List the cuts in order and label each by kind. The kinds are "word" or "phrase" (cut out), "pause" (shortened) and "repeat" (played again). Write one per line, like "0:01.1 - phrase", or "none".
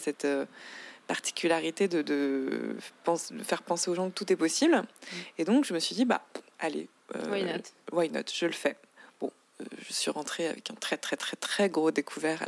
0:03.0 - pause